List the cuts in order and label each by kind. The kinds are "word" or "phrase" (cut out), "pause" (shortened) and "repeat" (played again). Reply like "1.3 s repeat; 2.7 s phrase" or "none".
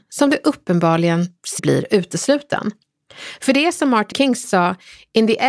1.6 s word; 4.1 s word; 4.4 s word